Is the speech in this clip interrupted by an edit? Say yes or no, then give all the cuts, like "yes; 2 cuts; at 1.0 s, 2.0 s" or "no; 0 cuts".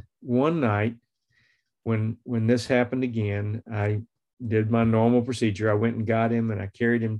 no; 0 cuts